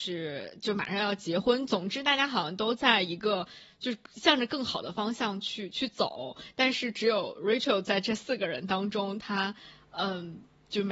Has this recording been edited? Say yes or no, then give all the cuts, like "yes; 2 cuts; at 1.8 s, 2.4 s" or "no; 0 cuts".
no; 0 cuts